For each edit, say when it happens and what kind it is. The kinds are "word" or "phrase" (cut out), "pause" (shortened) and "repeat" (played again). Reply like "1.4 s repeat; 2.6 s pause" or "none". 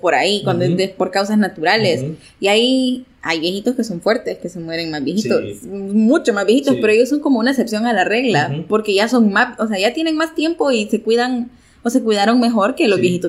none